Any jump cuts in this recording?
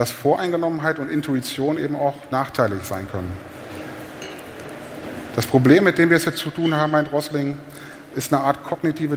no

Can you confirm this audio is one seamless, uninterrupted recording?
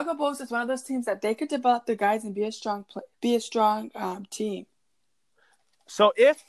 no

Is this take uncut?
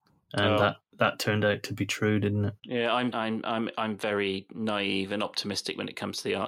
no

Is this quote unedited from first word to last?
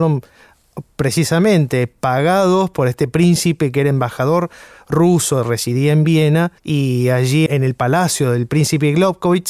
no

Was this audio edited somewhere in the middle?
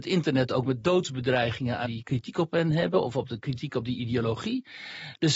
yes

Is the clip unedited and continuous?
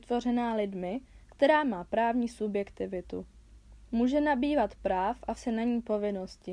no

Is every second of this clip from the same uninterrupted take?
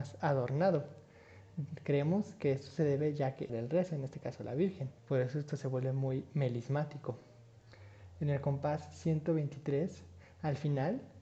no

